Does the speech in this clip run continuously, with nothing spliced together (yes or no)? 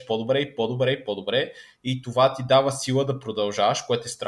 yes